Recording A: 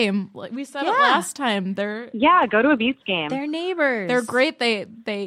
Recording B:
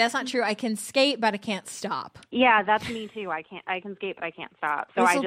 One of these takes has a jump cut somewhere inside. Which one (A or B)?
B